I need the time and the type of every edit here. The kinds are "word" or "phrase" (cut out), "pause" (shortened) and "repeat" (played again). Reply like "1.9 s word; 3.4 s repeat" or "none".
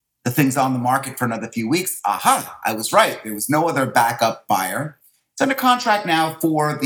none